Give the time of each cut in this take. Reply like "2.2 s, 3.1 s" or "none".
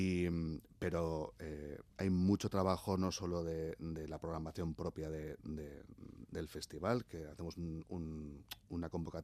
1.9 s

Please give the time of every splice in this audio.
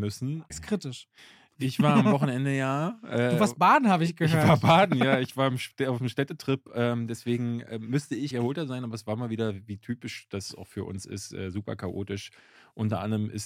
1.2 s, 8.3 s

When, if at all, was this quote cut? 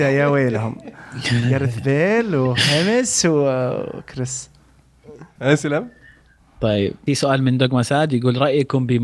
7.1 s

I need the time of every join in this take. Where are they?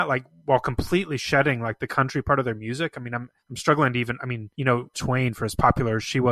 3.4 s, 4.5 s, 4.9 s

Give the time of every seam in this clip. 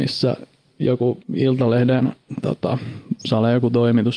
1.2 s

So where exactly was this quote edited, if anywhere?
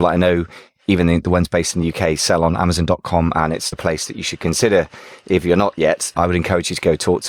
3.7 s, 6.1 s

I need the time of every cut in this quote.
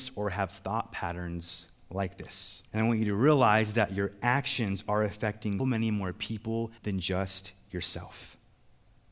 2.7 s, 5.6 s, 6.8 s

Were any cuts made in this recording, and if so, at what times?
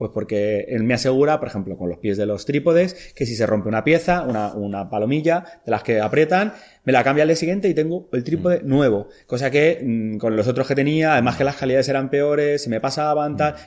none

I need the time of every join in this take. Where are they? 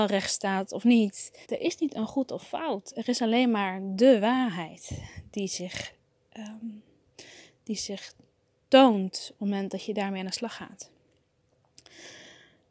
1.4 s

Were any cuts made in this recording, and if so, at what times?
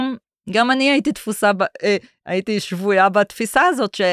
none

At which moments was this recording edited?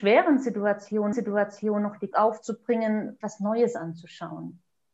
1.1 s, 2.1 s, 3.2 s

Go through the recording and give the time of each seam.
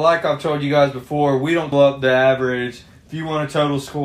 1.7 s

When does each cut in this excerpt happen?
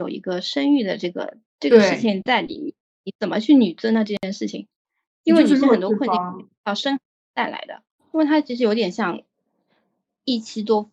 none

